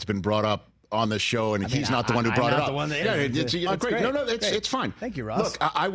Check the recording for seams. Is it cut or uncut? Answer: cut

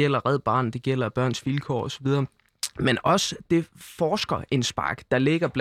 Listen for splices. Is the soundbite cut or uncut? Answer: uncut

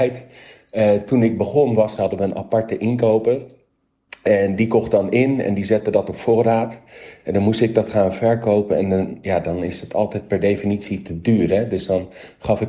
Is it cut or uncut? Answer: cut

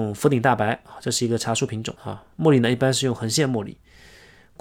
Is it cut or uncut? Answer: cut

